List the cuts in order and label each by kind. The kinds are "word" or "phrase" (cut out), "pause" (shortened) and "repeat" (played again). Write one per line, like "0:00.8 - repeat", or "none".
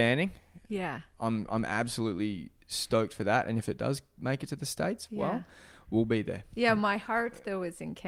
none